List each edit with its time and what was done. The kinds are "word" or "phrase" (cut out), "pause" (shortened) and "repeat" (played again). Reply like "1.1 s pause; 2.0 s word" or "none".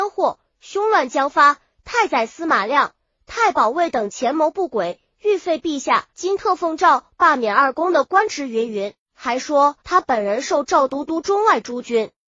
6.1 s pause; 9.0 s pause; 9.8 s pause